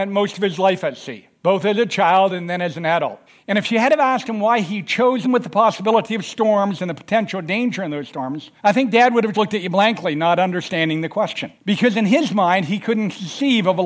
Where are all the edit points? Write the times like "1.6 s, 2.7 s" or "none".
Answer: 1.4 s, 3.3 s, 5.2 s, 8.6 s, 9.3 s, 11.6 s